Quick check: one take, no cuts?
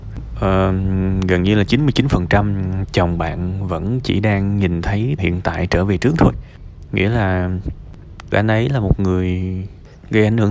no; 2 cuts; at 5.2 s, 8.3 s

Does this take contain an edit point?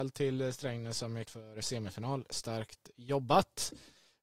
yes; 1 cut; at 1.2 s

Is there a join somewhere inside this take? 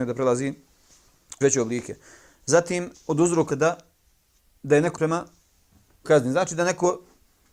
yes; 6 cuts; at 1.4 s, 2.9 s, 3.5 s, 4.3 s, 5.0 s, 6.0 s

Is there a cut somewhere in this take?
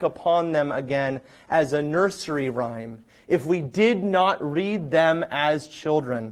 no; 0 cuts

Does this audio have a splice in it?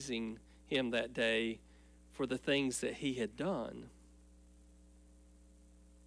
no; 0 cuts

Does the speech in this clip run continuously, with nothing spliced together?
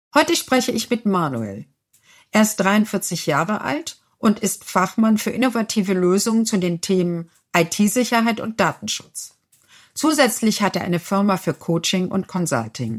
yes; 0 cuts

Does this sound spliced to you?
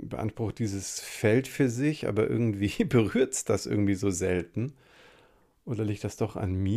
no; 0 cuts

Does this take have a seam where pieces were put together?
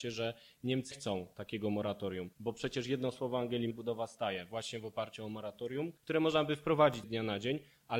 yes; 5 cuts; at 0.9 s, 2.3 s, 3.7 s, 6.0 s, 7.0 s

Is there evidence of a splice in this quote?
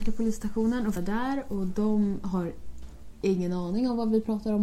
yes; 1 cut; at 1.0 s

